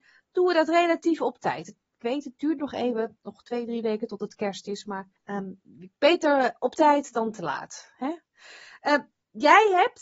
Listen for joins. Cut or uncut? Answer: cut